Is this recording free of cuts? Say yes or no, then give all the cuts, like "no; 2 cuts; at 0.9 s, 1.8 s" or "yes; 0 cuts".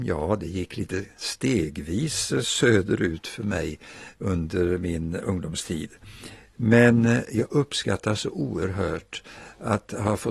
yes; 0 cuts